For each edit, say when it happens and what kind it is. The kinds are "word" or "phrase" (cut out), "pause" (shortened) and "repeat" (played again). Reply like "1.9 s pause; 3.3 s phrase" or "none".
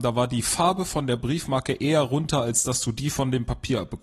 none